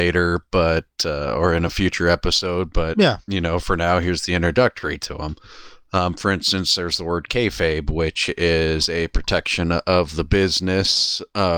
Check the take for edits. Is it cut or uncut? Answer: uncut